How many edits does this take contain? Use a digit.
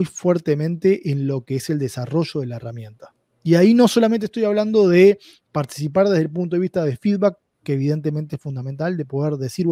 0